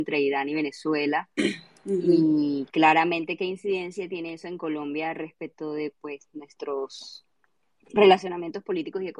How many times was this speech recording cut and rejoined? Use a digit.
0